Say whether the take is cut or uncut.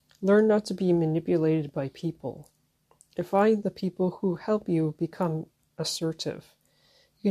uncut